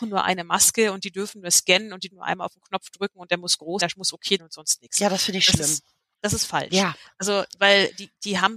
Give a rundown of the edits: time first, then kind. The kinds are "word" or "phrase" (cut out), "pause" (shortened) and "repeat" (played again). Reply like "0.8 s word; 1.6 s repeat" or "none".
2.1 s word; 3.8 s word; 4.4 s word